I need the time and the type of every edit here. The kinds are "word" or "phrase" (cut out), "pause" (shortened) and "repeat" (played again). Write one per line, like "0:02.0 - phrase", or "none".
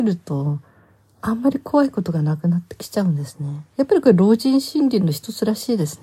0:03.7 - pause